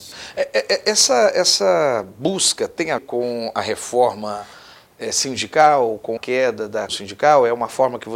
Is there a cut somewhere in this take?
yes; 3 cuts; at 3.0 s, 6.2 s, 6.9 s

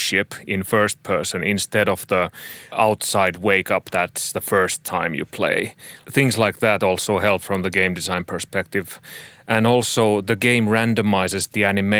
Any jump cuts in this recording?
no; 0 cuts

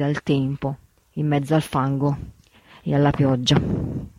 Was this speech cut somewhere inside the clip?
no; 0 cuts

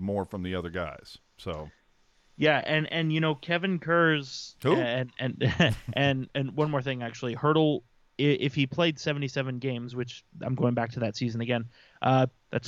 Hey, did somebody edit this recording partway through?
no; 0 cuts

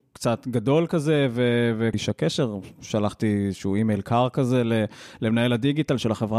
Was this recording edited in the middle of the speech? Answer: yes; 1 cut; at 1.9 s

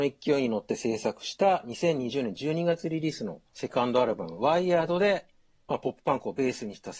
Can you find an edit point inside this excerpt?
yes; 1 cut; at 3.5 s

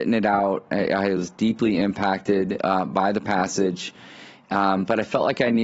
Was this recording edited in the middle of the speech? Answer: no; 0 cuts

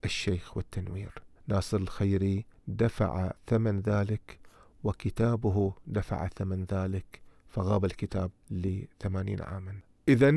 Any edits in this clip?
yes; 3 cuts; at 1.4 s, 3.4 s, 8.3 s

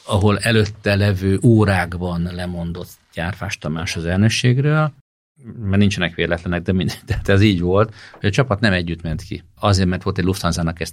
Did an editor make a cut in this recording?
no; 0 cuts

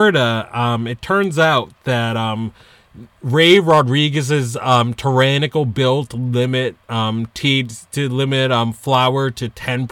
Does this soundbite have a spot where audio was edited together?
no; 0 cuts

